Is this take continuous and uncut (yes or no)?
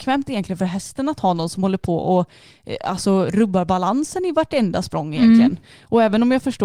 yes